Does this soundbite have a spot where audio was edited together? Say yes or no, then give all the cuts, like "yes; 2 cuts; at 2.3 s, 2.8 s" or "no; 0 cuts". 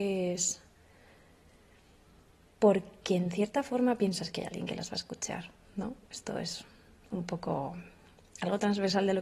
no; 0 cuts